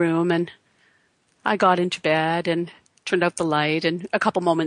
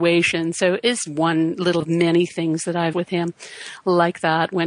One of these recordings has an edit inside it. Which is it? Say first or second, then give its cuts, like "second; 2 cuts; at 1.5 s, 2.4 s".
second; 3 cuts; at 1.1 s, 1.8 s, 2.9 s